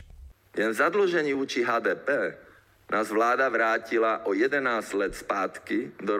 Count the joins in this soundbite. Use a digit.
0